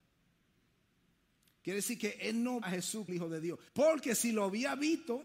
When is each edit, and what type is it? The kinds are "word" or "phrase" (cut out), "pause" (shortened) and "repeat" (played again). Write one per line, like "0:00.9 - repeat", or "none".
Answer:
0:02.6 - word
0:03.1 - word
0:03.7 - pause

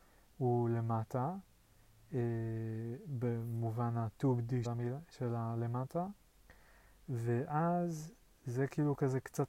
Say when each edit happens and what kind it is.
0:04.6 - word

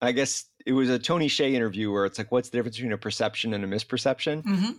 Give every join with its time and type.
none

